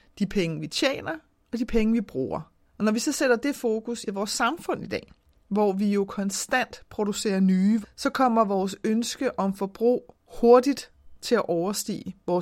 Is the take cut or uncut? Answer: cut